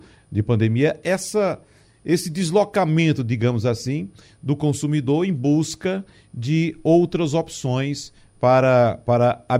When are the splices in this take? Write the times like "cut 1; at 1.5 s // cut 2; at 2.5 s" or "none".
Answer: none